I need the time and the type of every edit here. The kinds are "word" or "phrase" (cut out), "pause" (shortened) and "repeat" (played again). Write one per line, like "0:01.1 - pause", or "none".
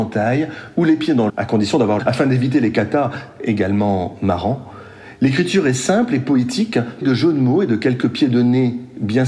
0:01.3 - word
0:02.0 - phrase
0:07.0 - word